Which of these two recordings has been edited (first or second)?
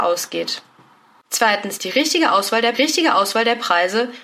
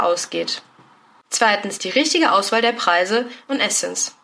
first